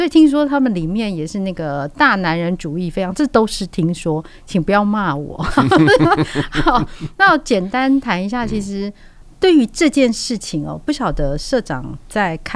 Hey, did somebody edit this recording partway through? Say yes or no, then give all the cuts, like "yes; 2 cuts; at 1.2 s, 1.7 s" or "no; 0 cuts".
no; 0 cuts